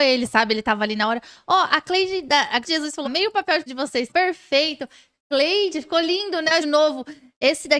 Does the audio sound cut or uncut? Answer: cut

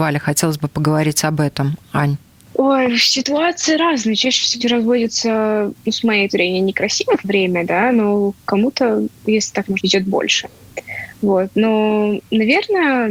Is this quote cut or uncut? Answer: cut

